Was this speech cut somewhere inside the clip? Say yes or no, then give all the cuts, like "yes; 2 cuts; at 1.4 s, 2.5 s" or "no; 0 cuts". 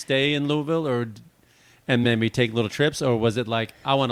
no; 0 cuts